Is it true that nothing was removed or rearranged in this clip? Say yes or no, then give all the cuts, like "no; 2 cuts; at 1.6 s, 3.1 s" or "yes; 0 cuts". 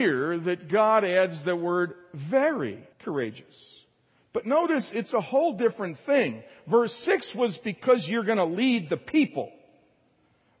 no; 1 cut; at 2.9 s